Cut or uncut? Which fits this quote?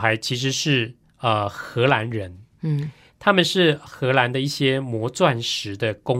cut